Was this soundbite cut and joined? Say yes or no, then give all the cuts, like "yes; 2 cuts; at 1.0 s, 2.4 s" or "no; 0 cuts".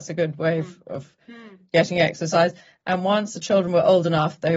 no; 0 cuts